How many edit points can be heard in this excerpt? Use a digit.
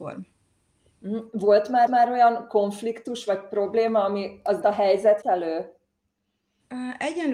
3